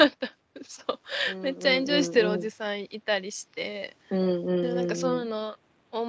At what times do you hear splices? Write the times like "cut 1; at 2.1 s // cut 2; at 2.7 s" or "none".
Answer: cut 1; at 4.0 s